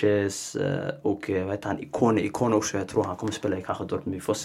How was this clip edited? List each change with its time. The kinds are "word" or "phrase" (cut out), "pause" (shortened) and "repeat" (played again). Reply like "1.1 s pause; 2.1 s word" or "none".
none